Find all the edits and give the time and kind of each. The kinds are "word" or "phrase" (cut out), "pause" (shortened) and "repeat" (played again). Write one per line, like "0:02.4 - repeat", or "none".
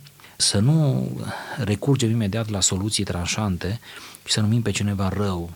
none